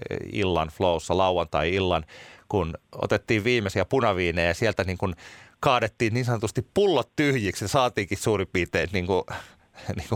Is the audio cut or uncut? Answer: uncut